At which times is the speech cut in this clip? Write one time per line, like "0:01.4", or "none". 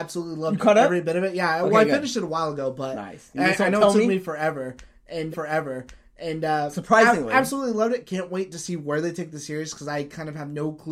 0:05.3